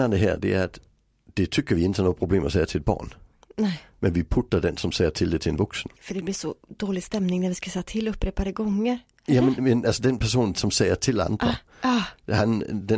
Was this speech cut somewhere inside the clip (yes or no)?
yes